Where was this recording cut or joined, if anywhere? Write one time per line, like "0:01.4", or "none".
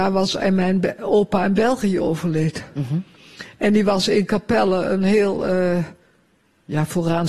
none